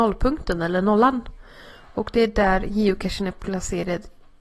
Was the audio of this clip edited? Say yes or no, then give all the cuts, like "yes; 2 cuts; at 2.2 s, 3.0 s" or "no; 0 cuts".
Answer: no; 0 cuts